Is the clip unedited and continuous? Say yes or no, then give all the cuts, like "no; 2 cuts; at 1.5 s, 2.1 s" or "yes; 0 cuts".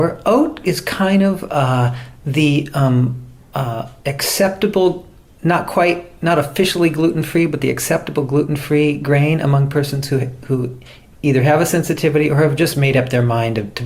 yes; 0 cuts